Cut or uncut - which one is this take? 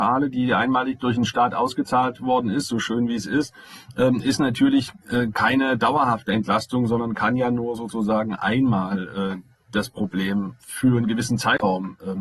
cut